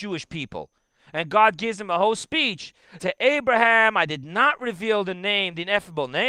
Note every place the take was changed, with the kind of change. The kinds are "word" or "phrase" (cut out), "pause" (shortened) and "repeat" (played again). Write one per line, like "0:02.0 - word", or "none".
0:03.0 - word